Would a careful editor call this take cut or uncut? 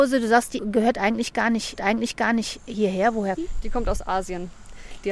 cut